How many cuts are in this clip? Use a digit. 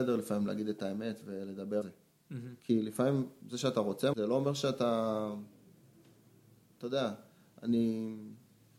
3